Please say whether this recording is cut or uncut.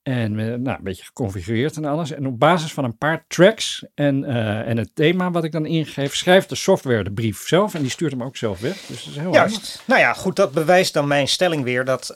uncut